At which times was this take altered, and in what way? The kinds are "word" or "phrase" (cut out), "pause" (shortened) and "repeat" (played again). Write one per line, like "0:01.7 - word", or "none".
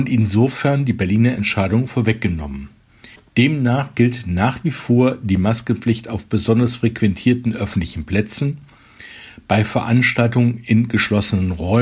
0:03.2 - pause